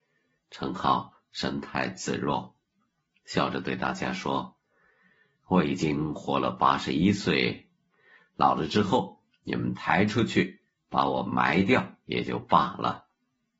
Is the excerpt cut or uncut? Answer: uncut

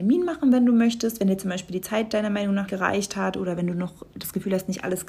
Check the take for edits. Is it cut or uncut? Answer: cut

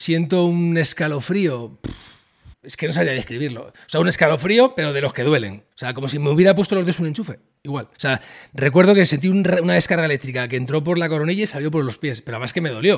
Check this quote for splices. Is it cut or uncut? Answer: cut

